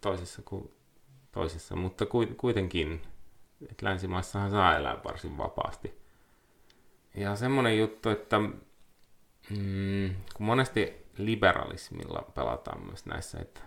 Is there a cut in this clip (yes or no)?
no